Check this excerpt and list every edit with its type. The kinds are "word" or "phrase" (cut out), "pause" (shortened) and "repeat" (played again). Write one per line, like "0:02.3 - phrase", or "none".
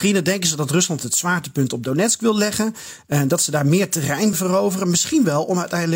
0:04.3 - word